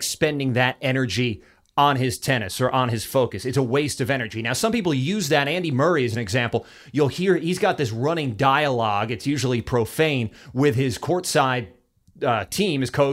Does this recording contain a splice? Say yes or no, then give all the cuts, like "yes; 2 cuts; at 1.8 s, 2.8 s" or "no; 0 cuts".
no; 0 cuts